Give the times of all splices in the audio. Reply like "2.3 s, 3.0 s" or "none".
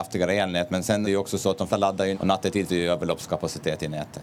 1.0 s, 1.7 s, 2.1 s, 2.7 s